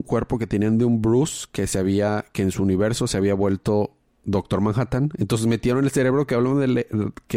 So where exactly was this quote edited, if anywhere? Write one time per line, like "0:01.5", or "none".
none